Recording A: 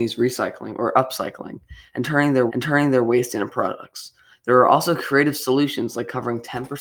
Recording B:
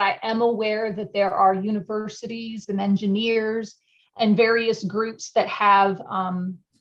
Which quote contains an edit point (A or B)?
A